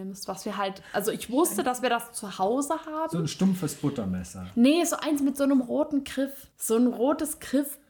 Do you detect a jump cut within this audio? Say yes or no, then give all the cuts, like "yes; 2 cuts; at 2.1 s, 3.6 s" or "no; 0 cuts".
yes; 1 cut; at 6.5 s